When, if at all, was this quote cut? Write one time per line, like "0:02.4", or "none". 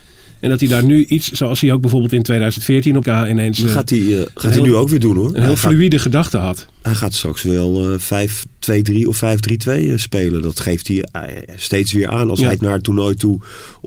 0:03.0
0:12.6

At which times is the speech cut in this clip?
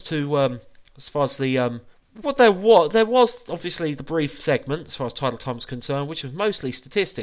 0:01.9

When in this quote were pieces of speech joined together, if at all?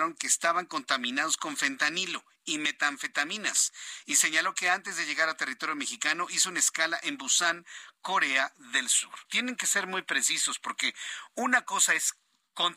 0:09.2

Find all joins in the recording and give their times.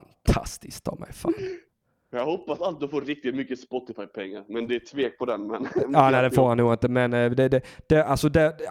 none

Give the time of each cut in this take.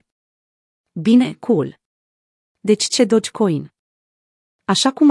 0:03.0

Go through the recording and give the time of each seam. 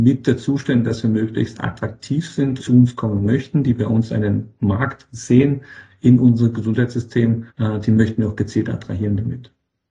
0:02.6
0:07.5

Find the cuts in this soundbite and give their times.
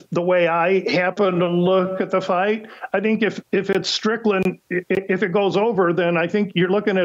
none

